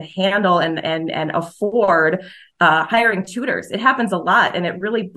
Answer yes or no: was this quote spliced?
no